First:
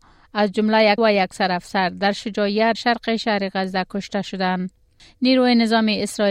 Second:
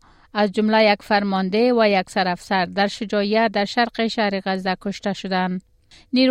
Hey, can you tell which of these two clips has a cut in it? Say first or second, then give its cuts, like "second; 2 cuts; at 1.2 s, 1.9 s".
first; 2 cuts; at 1.0 s, 2.7 s